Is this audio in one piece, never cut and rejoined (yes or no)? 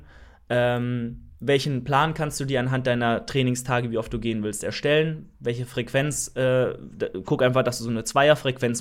no